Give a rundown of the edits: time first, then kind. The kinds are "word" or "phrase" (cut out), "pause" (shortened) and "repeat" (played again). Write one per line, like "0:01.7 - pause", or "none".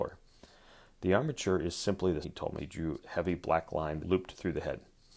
0:02.2 - word
0:02.6 - word
0:03.0 - word
0:04.0 - word